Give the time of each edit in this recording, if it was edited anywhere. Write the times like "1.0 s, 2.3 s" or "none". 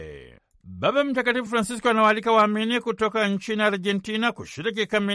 none